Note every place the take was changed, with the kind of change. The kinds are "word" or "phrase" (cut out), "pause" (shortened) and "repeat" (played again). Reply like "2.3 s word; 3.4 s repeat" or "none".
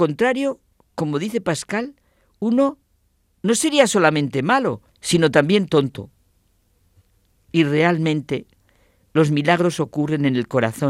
4.9 s pause